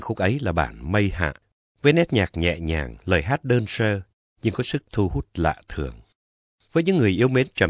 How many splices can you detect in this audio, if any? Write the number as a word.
zero